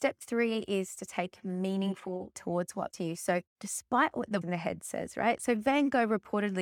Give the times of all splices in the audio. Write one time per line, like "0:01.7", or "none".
0:02.4
0:02.9
0:03.5
0:04.4

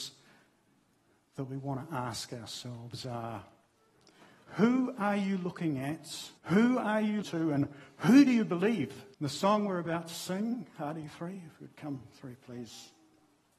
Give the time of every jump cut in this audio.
0:06.4
0:07.2
0:09.1

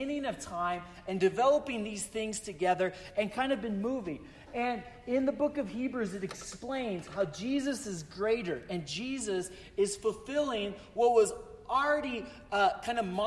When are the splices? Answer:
none

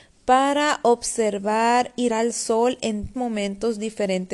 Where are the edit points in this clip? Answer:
0:02.1
0:03.1

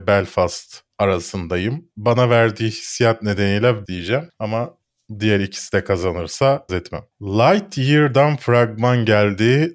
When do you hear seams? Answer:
0:03.8
0:06.7

